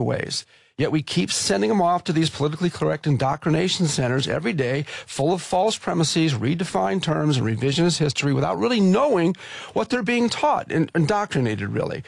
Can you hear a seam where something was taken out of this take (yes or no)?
no